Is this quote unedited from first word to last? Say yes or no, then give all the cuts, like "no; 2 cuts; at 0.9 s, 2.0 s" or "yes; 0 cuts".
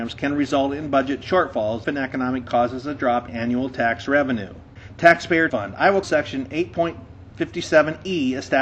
no; 5 cuts; at 1.8 s, 2.4 s, 3.3 s, 5.5 s, 6.0 s